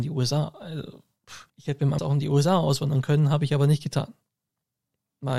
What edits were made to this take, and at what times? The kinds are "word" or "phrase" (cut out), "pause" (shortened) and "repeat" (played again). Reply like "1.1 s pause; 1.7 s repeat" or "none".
1.5 s pause; 2.0 s phrase